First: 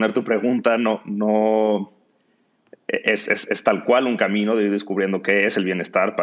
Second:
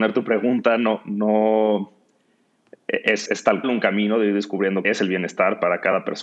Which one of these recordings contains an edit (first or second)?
second